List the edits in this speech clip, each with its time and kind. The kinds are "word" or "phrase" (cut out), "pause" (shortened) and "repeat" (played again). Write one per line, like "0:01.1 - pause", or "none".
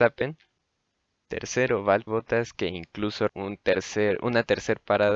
0:02.1 - word
0:03.3 - word